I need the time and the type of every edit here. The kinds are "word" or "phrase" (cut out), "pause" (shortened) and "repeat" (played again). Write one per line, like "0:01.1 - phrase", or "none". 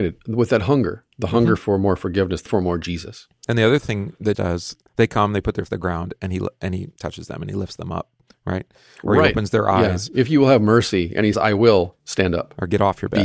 0:01.6 - phrase
0:02.5 - word
0:04.3 - word
0:05.7 - word
0:08.3 - pause
0:11.3 - word
0:12.0 - pause